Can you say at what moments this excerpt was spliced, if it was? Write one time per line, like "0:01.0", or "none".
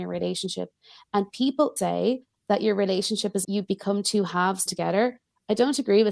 0:01.8
0:03.4
0:04.7